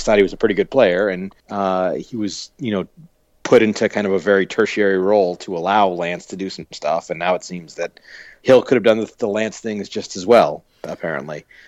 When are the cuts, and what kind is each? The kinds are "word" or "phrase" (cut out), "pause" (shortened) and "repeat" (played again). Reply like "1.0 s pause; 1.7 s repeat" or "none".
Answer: 1.4 s pause